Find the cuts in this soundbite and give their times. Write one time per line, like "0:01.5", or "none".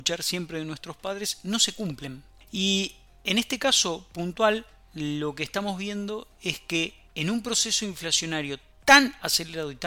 none